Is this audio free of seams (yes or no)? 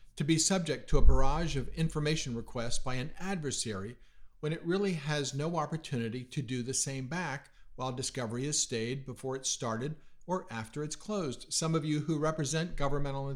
yes